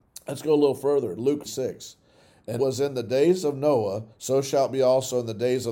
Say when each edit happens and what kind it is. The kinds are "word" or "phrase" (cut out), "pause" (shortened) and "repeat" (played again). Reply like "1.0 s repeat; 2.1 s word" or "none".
1.4 s phrase; 2.6 s word; 4.1 s pause